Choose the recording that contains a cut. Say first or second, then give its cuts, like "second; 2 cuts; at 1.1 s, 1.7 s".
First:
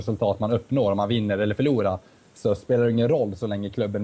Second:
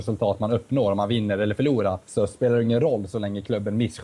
second; 1 cut; at 2.0 s